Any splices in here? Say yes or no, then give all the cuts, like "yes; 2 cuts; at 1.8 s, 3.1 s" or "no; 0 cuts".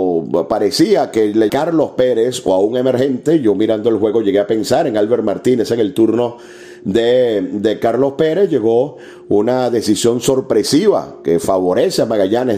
yes; 1 cut; at 1.5 s